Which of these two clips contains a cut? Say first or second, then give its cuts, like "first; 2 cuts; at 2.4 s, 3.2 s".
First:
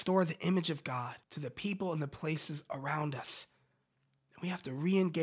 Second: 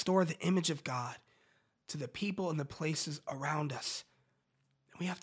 first; 1 cut; at 1.2 s